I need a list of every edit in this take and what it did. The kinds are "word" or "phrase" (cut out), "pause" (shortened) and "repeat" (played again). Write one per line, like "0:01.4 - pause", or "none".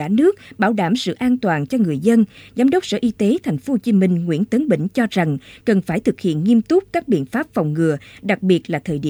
none